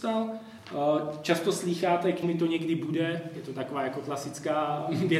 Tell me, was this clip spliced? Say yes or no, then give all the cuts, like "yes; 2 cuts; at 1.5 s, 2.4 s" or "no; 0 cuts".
yes; 1 cut; at 2.2 s